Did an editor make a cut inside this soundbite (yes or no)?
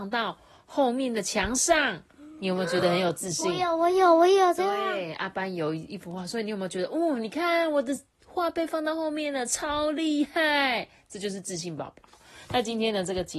no